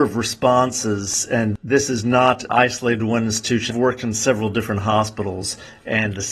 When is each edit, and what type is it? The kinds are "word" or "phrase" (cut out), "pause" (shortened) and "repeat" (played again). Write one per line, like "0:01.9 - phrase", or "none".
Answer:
0:02.5 - word
0:03.7 - phrase